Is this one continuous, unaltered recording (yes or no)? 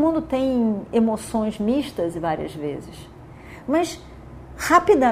yes